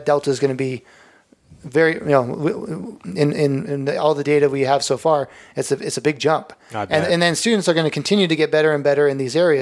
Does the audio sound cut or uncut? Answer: uncut